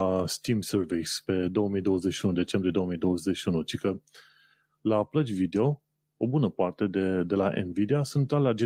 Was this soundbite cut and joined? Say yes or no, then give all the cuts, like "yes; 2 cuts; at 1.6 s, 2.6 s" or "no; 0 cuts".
no; 0 cuts